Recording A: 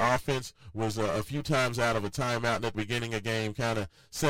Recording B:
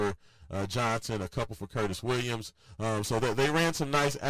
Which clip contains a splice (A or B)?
A